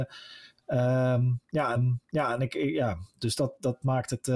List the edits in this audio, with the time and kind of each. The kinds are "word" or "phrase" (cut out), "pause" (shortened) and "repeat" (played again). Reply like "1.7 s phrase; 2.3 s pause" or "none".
1.8 s repeat